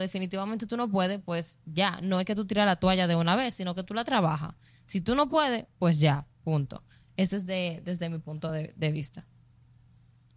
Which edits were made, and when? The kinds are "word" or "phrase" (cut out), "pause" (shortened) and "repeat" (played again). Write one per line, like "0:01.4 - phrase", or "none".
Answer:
none